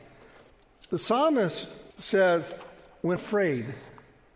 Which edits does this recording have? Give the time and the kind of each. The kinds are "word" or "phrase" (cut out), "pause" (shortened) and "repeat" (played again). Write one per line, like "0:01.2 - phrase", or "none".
0:01.9 - pause
0:03.2 - word